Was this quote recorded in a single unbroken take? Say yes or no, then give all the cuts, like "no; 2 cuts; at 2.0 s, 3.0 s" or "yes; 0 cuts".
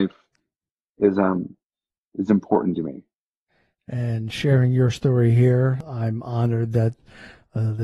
yes; 0 cuts